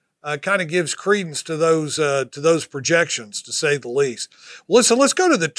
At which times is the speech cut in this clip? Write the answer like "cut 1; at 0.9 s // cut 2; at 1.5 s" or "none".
none

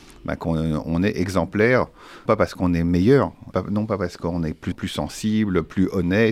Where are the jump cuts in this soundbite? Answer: cut 1; at 2.3 s // cut 2; at 3.5 s // cut 3; at 4.7 s

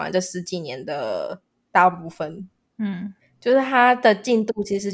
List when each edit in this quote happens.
none

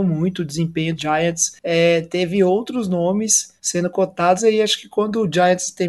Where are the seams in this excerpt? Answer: cut 1; at 1.0 s // cut 2; at 3.6 s // cut 3; at 4.4 s

